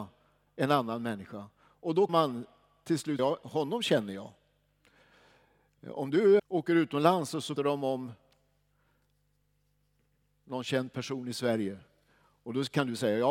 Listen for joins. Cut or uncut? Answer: cut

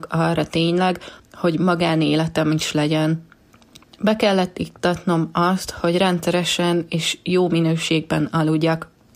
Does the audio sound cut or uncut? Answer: uncut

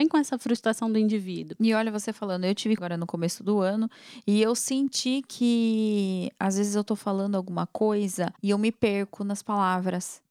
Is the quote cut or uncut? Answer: cut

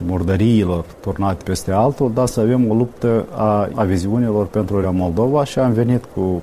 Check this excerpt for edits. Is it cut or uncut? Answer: cut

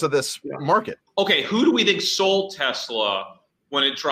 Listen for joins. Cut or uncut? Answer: cut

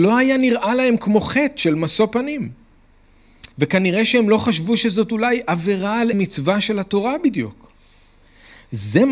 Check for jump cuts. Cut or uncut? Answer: cut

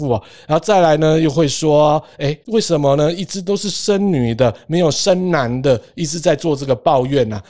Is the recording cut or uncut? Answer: cut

